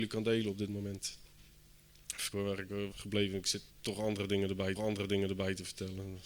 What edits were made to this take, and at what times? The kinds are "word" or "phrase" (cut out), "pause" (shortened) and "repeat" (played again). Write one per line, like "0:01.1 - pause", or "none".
0:02.3 - word
0:02.9 - word
0:03.7 - pause
0:04.7 - repeat